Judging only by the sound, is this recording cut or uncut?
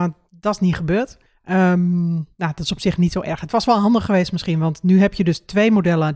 cut